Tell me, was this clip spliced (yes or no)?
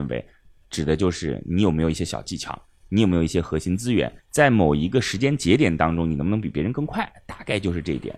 yes